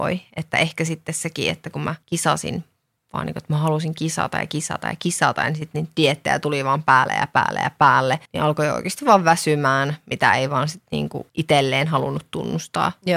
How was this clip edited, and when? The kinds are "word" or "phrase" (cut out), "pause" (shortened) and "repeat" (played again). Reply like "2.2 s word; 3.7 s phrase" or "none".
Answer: 2.0 s pause; 8.3 s pause; 11.3 s pause